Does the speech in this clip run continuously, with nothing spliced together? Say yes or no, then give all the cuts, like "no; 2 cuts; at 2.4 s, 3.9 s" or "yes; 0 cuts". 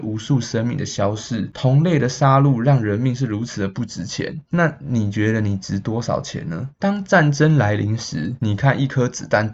no; 1 cut; at 6.7 s